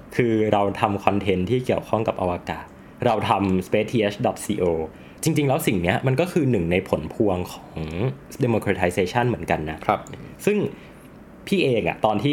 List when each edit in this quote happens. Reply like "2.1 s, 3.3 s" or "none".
8.4 s